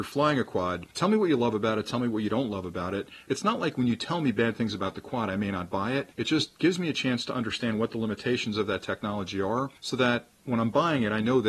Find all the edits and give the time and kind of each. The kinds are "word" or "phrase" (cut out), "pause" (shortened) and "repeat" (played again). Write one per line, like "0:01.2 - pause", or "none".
0:00.9 - pause
0:06.1 - pause
0:09.8 - pause